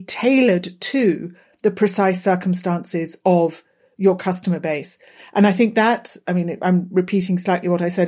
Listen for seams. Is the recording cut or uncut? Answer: uncut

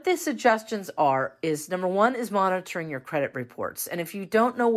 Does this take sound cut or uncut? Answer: uncut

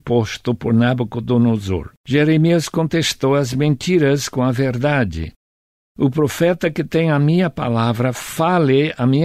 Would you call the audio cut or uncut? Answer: cut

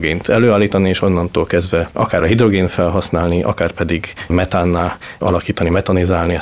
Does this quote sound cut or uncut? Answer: uncut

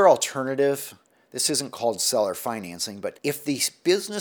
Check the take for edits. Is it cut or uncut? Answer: uncut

